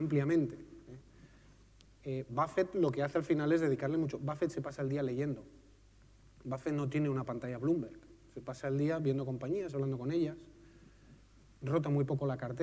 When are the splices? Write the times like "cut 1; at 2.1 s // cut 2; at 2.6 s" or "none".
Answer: none